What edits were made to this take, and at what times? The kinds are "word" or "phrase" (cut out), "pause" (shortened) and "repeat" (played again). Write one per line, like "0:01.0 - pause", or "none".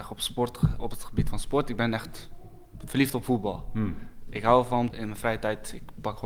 0:04.9 - word